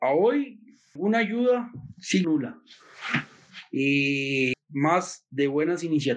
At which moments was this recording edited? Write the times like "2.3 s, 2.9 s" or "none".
1.0 s, 2.2 s, 4.5 s